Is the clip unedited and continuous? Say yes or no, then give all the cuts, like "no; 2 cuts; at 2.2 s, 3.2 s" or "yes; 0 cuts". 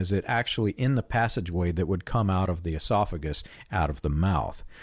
yes; 0 cuts